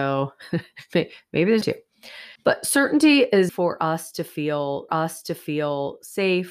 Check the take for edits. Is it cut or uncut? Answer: cut